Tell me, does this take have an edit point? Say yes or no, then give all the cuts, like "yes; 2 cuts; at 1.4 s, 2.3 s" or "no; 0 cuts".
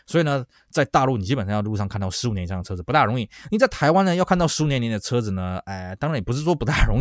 no; 0 cuts